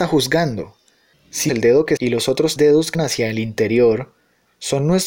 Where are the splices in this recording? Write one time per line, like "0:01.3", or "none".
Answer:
0:01.5
0:02.0
0:02.6
0:02.9